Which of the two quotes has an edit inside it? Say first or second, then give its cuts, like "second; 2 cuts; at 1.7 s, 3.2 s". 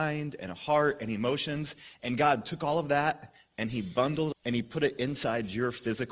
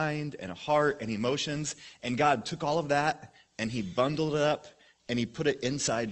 first; 1 cut; at 4.3 s